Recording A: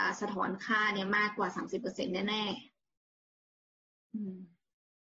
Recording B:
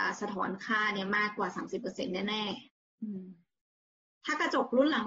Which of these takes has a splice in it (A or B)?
B